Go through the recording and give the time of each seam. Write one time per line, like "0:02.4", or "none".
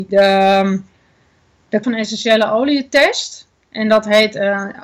0:01.8

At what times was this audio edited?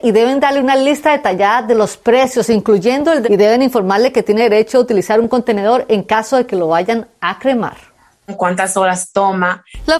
0:03.2

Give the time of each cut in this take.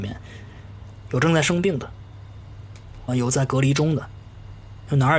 0:03.1

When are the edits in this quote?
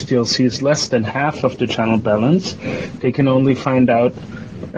none

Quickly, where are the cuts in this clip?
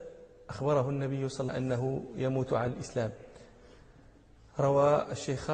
0:01.5

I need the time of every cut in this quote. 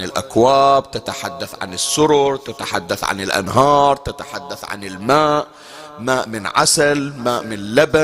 none

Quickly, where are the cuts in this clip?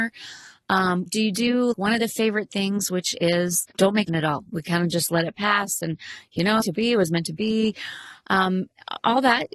0:01.1
0:01.7
0:03.7
0:04.1
0:06.6

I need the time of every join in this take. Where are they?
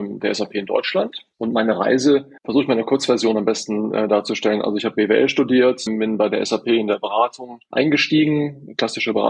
0:01.3
0:02.4
0:05.9

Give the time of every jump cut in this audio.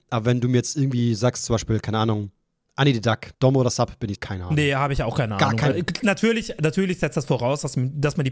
0:02.4
0:03.3
0:04.1
0:05.7

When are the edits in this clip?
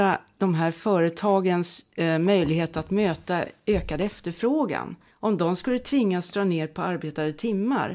none

